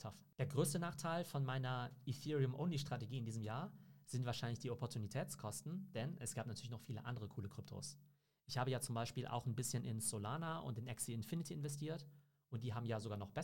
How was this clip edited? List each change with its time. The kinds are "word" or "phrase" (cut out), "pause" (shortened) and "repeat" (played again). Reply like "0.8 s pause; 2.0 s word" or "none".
none